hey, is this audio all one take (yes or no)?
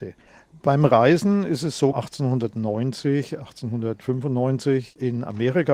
no